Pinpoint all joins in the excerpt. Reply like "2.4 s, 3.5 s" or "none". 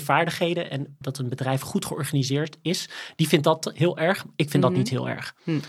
1.0 s

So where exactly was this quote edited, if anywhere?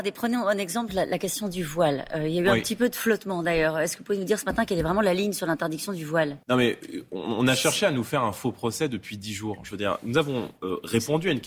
6.4 s

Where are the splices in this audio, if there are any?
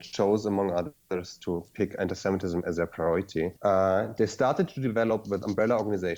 3.6 s

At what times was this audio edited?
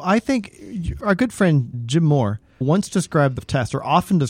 1.0 s, 1.7 s, 2.6 s, 3.4 s

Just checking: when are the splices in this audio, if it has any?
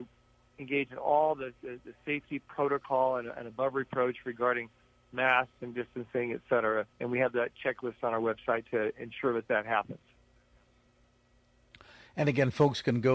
6.9 s

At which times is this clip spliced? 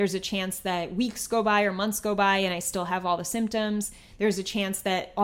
none

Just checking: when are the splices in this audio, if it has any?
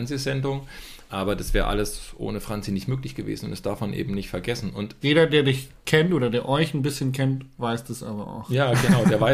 5.0 s

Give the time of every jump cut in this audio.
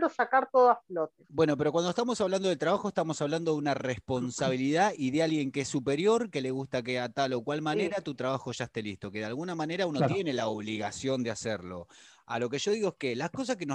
none

